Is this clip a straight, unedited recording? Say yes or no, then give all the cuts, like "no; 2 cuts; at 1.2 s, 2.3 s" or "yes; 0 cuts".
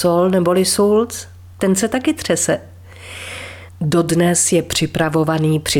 yes; 0 cuts